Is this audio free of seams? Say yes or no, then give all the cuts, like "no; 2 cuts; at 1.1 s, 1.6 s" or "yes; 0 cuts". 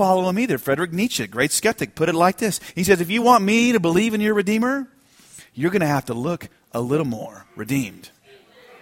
yes; 0 cuts